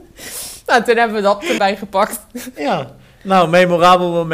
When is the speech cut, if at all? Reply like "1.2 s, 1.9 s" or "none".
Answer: 1.6 s